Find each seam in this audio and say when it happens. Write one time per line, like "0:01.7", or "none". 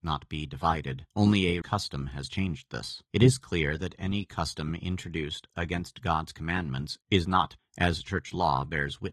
0:01.1
0:01.6
0:03.1
0:07.0
0:07.6

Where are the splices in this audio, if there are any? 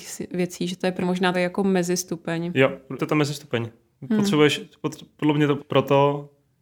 0:01.0
0:01.3
0:03.0
0:05.6

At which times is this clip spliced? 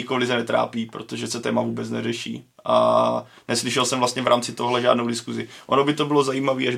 0:01.4

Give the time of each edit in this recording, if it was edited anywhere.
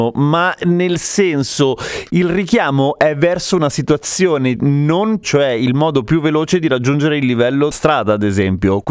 0:04.6
0:05.2
0:07.7

